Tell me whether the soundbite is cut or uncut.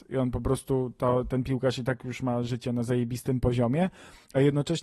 uncut